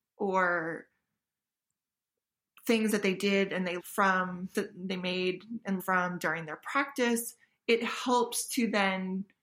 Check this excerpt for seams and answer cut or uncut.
cut